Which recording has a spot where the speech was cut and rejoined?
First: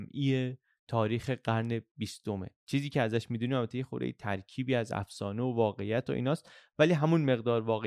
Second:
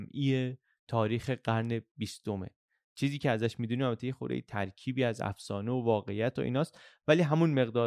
first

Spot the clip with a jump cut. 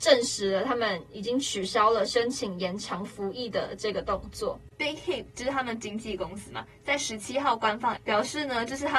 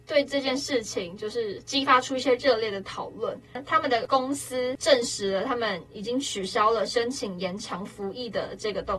first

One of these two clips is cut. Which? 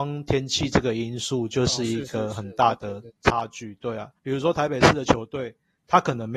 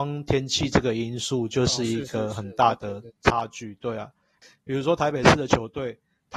first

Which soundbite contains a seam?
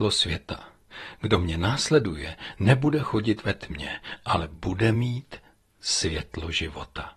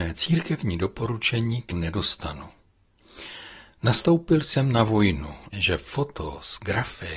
second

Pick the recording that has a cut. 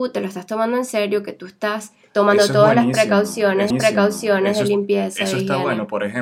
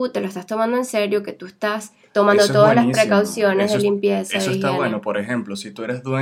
first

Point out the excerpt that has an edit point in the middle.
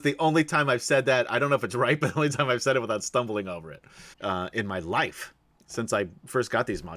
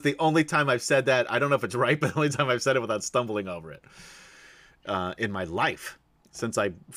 first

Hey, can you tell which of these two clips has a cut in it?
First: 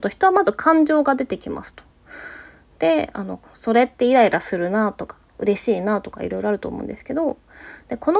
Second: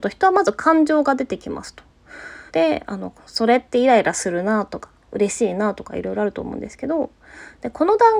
second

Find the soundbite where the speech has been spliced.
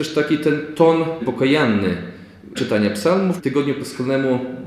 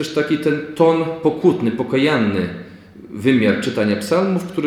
first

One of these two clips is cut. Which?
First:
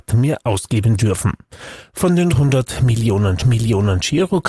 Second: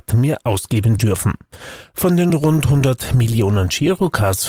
first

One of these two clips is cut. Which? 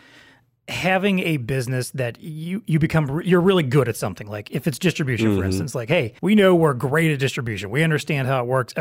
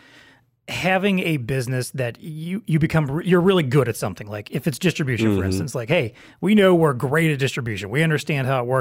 first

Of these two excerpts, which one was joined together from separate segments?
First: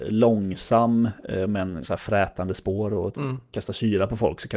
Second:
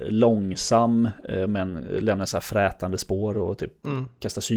first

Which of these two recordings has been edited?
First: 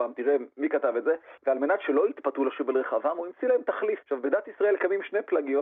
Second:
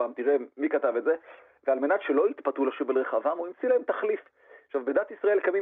first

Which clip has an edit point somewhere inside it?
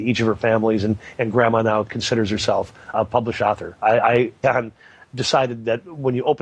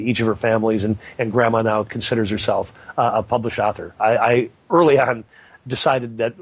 first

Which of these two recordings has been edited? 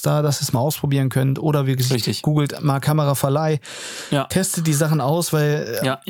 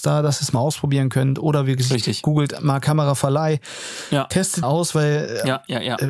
second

